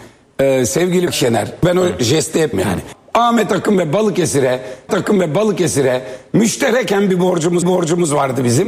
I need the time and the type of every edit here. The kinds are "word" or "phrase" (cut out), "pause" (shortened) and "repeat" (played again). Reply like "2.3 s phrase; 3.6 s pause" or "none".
1.1 s word; 2.5 s word; 4.9 s repeat; 7.6 s repeat